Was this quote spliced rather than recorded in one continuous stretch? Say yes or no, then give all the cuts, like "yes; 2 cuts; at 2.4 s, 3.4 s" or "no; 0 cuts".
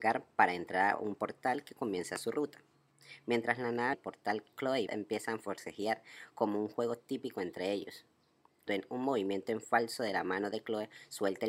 yes; 3 cuts; at 3.9 s, 4.9 s, 8.7 s